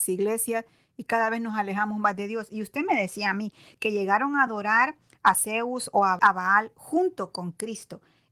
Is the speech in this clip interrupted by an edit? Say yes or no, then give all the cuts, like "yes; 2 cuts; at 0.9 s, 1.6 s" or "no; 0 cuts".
no; 0 cuts